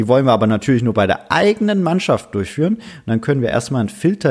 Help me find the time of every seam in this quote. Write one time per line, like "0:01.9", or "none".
none